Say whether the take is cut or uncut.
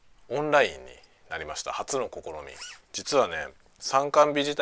cut